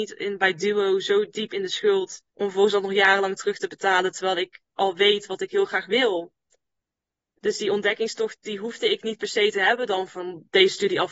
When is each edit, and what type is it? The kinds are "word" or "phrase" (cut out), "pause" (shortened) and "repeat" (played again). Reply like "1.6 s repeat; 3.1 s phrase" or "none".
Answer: 2.3 s pause